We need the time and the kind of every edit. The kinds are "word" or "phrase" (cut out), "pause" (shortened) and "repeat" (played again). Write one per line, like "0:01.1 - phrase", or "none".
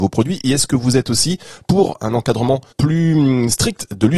0:02.7 - pause

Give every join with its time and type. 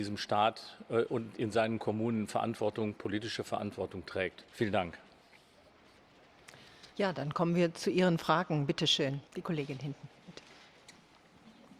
0:04.5 - pause
0:06.9 - pause
0:09.3 - pause

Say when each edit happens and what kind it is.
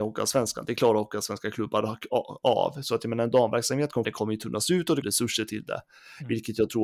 0:04.0 - phrase
0:05.0 - phrase

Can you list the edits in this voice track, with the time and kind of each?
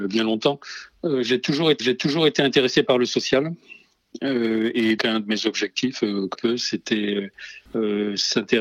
0:01.8 - repeat
0:05.0 - word
0:06.3 - phrase
0:07.7 - pause

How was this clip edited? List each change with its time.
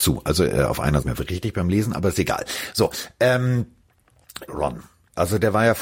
0:01.0 - phrase
0:04.5 - word

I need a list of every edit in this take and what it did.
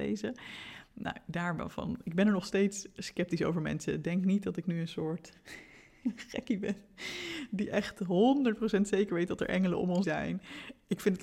0:10.0 - word

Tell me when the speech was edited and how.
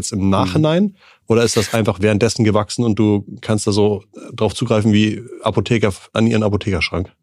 none

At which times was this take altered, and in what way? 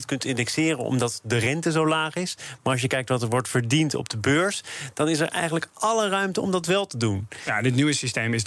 none

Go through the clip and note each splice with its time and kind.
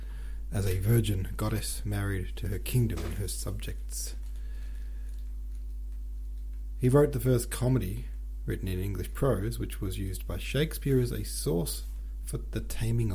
none

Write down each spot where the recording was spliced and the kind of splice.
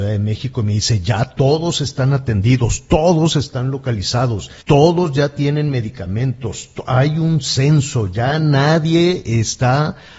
0:04.6 - pause

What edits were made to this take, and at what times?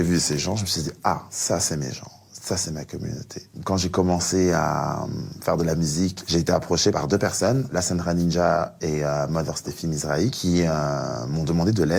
none

